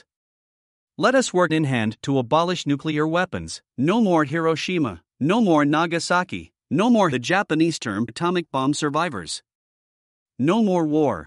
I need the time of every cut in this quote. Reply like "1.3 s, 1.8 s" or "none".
1.5 s, 3.7 s, 5.1 s, 6.6 s, 7.1 s, 8.1 s